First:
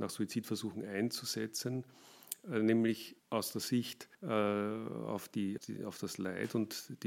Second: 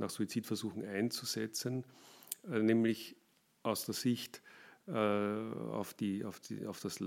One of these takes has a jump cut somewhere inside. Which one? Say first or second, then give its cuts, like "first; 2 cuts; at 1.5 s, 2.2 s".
first; 3 cuts; at 3.2 s, 4.1 s, 5.6 s